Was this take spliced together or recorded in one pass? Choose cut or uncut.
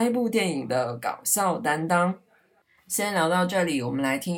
uncut